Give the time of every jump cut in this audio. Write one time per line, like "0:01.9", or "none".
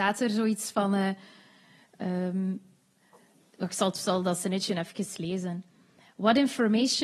none

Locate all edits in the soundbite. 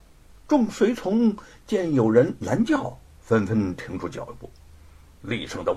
none

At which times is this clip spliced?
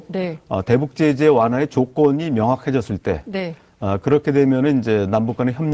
none

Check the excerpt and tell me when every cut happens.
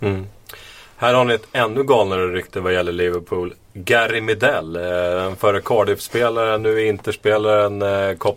none

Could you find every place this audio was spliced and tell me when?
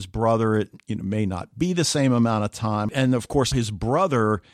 0:03.5

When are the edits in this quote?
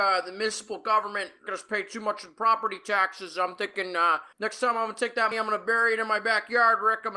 0:01.5
0:04.3
0:05.3

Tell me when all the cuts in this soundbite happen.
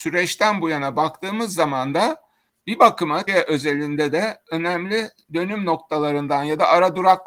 0:03.3

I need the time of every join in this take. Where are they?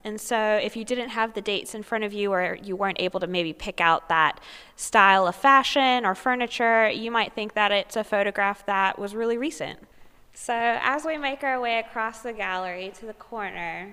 none

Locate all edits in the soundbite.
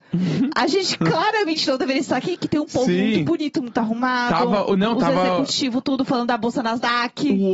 none

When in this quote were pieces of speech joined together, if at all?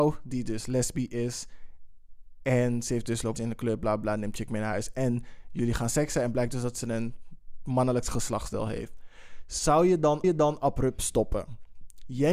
0:03.4
0:10.2

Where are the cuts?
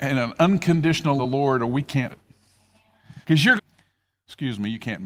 0:01.2
0:02.1
0:03.2
0:03.6

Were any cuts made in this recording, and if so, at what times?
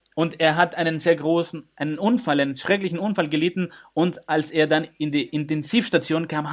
none

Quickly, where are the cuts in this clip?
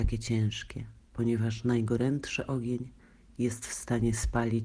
0:01.0

